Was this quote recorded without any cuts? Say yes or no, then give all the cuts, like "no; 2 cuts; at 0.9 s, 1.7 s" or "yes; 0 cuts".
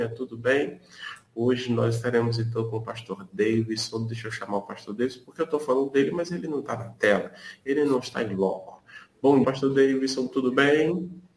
no; 1 cut; at 9.4 s